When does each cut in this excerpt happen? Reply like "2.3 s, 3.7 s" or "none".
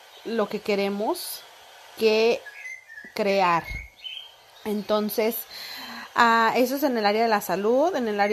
none